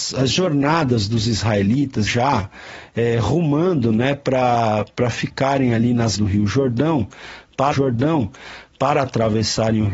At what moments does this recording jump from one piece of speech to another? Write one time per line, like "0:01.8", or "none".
0:02.1
0:06.1
0:07.7

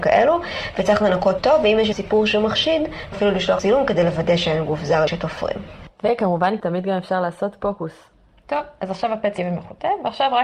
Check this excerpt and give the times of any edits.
0:01.4
0:01.9
0:03.1
0:03.6
0:05.1
0:09.4

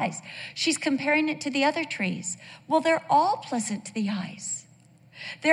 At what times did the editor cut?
none

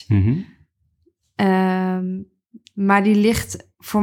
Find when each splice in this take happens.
none

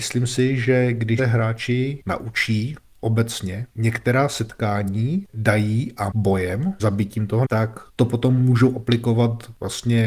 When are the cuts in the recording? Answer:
0:01.2
0:03.7
0:05.3
0:06.1
0:06.8
0:07.4
0:07.9

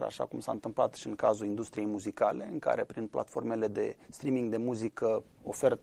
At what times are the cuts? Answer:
0:02.9
0:04.0

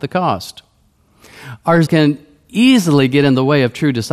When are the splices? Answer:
0:01.9

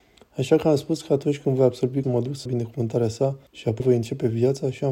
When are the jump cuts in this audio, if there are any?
0:02.0
0:02.5
0:03.5
0:03.8

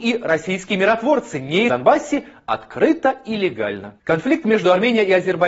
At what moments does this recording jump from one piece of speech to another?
0:01.7

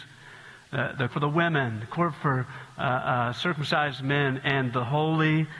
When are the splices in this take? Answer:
0:01.1

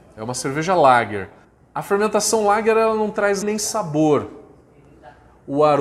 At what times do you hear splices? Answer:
0:01.4
0:03.4

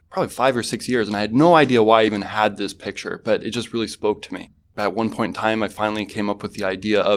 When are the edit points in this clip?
none

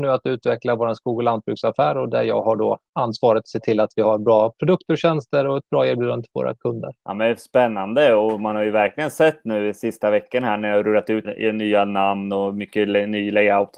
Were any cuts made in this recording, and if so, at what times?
0:07.0
0:11.2

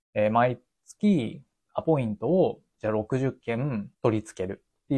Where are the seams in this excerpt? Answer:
0:03.9

